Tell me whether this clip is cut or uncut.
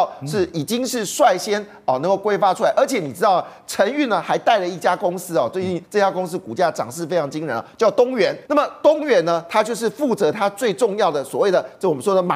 cut